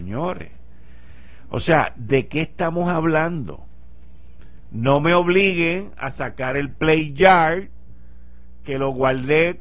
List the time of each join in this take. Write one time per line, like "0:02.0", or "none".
none